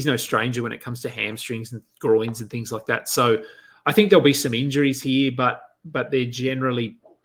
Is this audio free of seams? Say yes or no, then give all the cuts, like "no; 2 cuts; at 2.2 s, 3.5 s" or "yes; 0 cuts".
yes; 0 cuts